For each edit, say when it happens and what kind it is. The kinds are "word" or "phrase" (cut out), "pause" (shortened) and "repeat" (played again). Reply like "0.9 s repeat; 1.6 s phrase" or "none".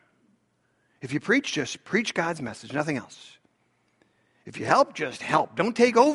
none